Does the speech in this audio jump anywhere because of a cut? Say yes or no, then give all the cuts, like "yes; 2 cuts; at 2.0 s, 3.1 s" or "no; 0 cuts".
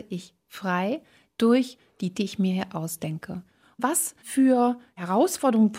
yes; 1 cut; at 2.1 s